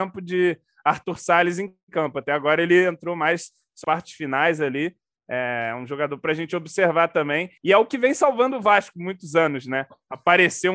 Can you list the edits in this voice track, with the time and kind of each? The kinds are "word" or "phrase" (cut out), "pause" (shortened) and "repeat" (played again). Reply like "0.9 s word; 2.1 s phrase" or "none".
3.8 s word; 7.6 s pause